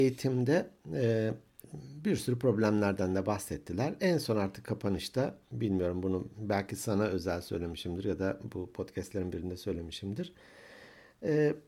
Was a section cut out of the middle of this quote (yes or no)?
yes